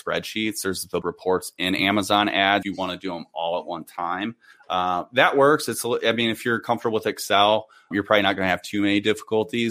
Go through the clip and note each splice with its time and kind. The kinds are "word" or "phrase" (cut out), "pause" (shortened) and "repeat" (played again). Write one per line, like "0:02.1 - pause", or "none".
0:01.0 - word
0:02.6 - word
0:07.9 - word